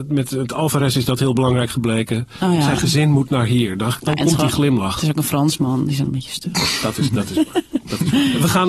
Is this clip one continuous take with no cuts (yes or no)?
no